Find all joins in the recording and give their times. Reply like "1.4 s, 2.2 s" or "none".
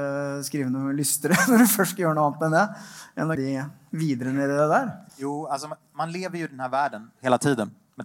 3.4 s, 5.1 s